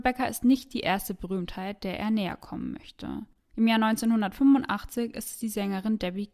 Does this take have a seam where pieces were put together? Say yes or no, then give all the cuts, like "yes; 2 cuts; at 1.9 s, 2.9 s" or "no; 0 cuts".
no; 0 cuts